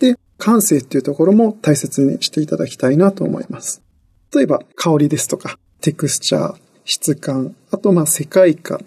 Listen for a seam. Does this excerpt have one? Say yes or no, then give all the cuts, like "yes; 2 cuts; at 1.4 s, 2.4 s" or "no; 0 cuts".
no; 0 cuts